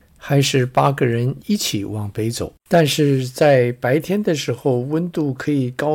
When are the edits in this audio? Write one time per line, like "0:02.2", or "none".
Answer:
0:02.6